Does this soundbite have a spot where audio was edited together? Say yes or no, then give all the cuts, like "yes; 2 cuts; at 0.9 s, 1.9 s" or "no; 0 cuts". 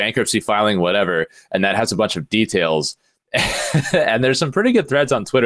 no; 0 cuts